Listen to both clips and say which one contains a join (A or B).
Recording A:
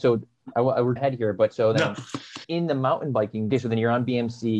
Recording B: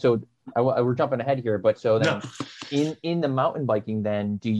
A